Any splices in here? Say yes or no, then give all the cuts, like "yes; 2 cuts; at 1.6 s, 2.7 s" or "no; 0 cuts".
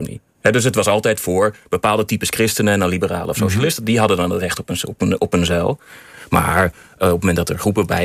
no; 0 cuts